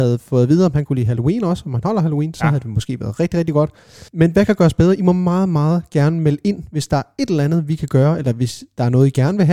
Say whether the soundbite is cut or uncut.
cut